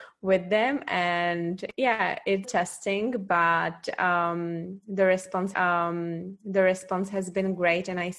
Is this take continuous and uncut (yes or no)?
no